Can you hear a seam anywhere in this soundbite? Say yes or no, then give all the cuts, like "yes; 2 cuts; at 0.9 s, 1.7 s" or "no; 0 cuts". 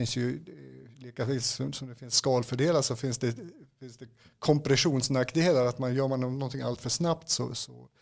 no; 0 cuts